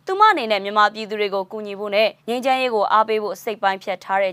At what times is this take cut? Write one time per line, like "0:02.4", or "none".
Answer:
0:02.2